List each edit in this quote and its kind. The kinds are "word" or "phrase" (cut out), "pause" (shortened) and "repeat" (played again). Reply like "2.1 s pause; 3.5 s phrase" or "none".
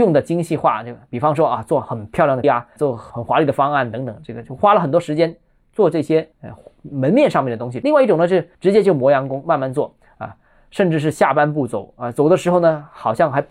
2.4 s word; 2.8 s word; 6.3 s pause; 8.5 s pause